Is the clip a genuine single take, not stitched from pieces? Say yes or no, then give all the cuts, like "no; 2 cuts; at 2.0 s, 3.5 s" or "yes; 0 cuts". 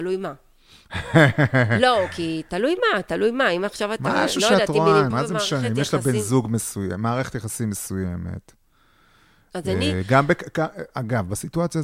no; 1 cut; at 5.1 s